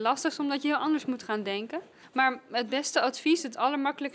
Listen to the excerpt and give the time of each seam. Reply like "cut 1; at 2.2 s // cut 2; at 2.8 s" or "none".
none